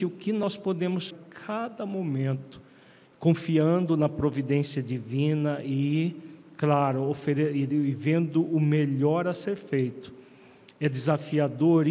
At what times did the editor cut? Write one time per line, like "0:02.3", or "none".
0:01.1